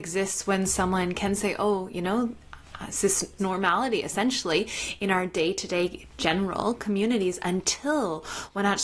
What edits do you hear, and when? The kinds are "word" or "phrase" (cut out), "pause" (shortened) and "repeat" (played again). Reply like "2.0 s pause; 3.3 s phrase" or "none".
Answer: 3.4 s word

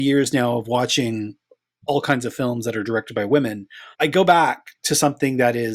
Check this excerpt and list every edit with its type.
3.9 s pause

